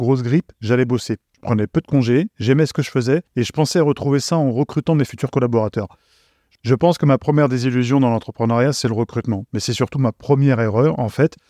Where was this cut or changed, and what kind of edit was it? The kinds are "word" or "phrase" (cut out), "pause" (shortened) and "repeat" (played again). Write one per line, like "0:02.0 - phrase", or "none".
none

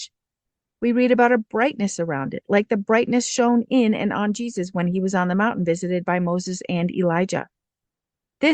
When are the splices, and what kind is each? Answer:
none

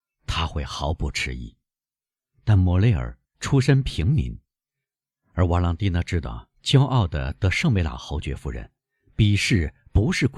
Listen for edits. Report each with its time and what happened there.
none

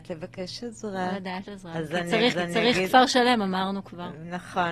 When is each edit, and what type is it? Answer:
0:01.5 - word
0:02.3 - repeat

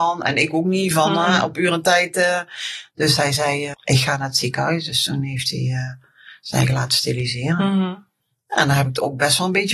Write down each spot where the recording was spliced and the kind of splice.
0:03.7 - word

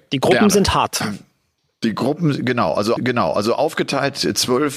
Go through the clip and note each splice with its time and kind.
0:01.6 - pause
0:03.0 - repeat

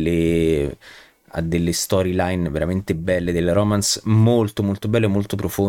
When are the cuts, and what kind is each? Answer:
none

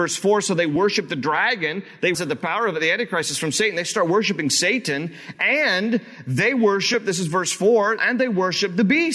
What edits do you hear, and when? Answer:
0:02.1 - word
0:08.0 - word

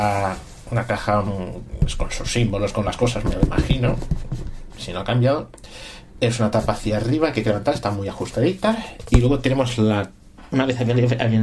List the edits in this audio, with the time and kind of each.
none

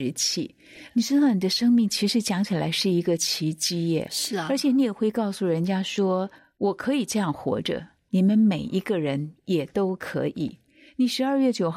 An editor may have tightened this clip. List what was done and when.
0:06.4 - pause

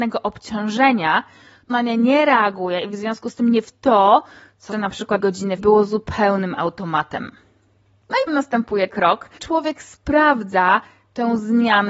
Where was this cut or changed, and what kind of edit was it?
0:01.7 - word
0:03.6 - word
0:04.7 - word
0:05.2 - word
0:05.6 - word
0:08.3 - word
0:08.9 - word
0:09.4 - word

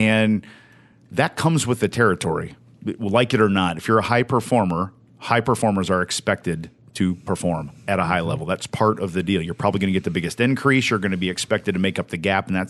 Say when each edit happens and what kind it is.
none

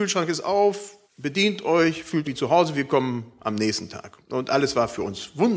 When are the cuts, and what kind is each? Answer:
0:01.1 - pause
0:02.2 - word

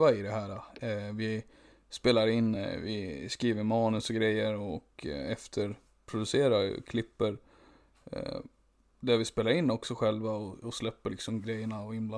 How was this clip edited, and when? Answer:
none

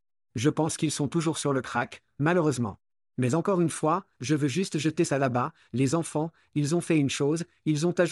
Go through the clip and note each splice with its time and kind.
none

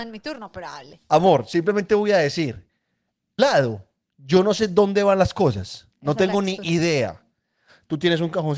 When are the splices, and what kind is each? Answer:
0:03.4 - word

